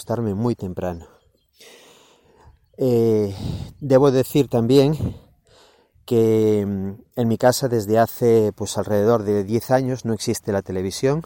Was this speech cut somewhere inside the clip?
no; 0 cuts

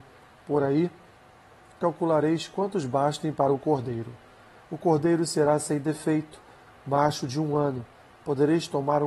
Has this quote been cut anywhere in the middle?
no; 0 cuts

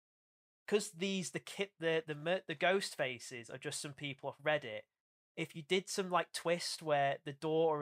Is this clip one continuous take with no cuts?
yes; 0 cuts

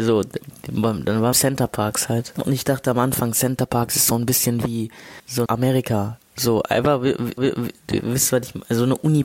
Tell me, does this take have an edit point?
yes; 4 cuts; at 1.3 s, 5.5 s, 6.2 s, 7.4 s

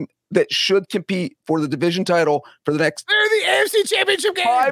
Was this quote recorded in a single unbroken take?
yes; 0 cuts

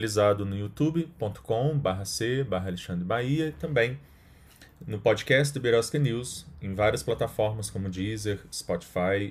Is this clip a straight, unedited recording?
yes; 0 cuts

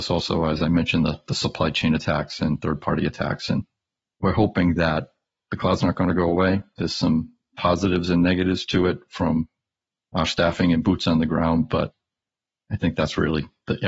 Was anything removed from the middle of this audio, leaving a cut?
no; 0 cuts

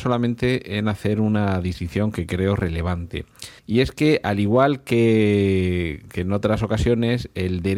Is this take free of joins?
no; 1 cut; at 3.6 s

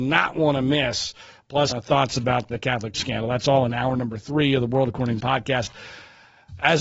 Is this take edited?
yes; 4 cuts; at 1.7 s, 2.5 s, 2.9 s, 5.2 s

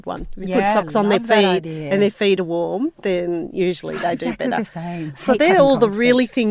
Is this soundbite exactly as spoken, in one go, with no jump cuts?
yes; 0 cuts

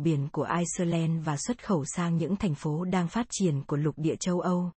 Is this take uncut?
yes; 0 cuts

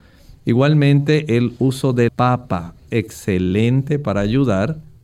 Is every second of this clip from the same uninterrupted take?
no; 2 cuts; at 2.1 s, 2.9 s

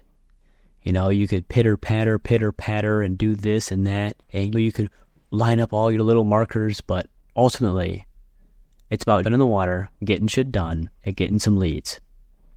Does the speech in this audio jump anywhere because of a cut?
yes; 6 cuts; at 4.2 s, 4.5 s, 7.1 s, 9.2 s, 9.9 s, 11.0 s

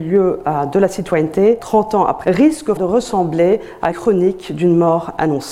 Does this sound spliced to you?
yes; 4 cuts; at 1.6 s, 2.2 s, 2.8 s, 3.9 s

